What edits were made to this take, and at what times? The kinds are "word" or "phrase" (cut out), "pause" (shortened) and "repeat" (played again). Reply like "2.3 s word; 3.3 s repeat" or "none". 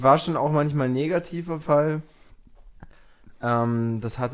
1.6 s word